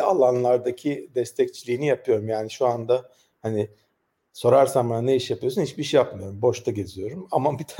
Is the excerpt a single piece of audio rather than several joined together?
yes; 0 cuts

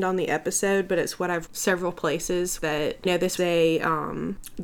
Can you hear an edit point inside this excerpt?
yes; 4 cuts; at 1.5 s, 2.6 s, 3.0 s, 3.4 s

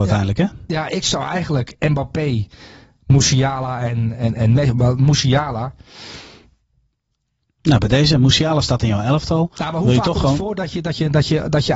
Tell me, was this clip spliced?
no; 0 cuts

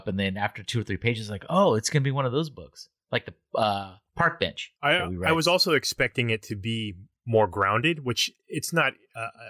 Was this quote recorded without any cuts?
no; 2 cuts; at 4.8 s, 8.4 s

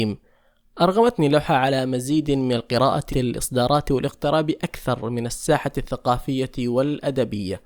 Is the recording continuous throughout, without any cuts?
no; 1 cut; at 3.1 s

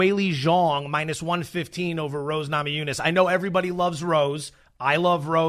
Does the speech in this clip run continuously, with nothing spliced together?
yes; 0 cuts

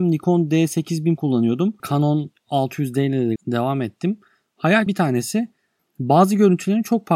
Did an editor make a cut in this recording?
yes; 3 cuts; at 1.2 s, 3.4 s, 4.9 s

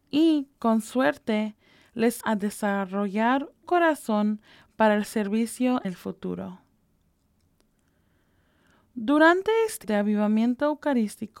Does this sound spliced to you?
yes; 4 cuts; at 2.2 s, 3.6 s, 5.8 s, 9.8 s

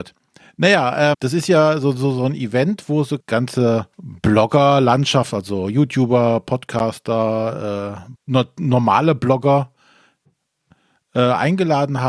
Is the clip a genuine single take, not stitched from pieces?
no; 4 cuts; at 1.1 s, 3.2 s, 3.9 s, 8.2 s

